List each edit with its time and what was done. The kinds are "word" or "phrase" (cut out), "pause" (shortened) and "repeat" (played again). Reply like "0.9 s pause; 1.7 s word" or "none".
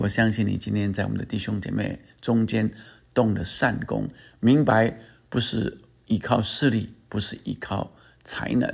none